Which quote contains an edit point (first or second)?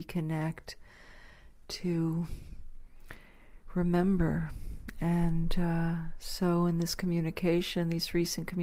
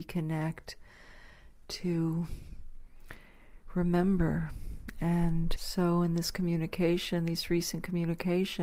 second